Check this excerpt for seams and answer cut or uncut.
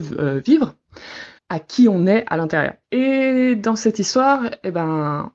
cut